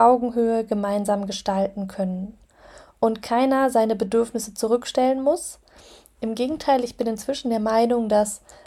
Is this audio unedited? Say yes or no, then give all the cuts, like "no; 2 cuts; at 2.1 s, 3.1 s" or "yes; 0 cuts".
yes; 0 cuts